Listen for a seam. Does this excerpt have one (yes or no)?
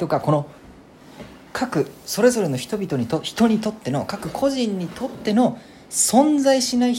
yes